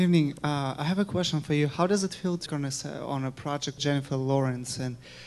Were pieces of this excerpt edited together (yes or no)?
yes